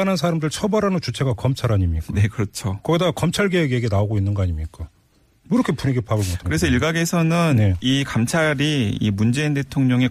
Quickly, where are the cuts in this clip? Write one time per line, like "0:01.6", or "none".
none